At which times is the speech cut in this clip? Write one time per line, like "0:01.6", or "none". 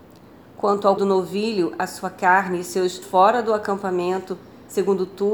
0:01.0
0:03.0